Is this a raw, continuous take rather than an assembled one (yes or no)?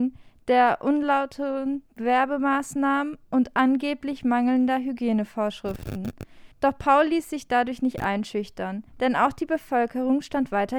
no